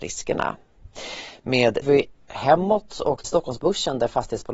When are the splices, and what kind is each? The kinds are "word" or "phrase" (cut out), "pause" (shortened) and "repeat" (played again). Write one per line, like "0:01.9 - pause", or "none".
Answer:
0:01.8 - phrase
0:03.2 - word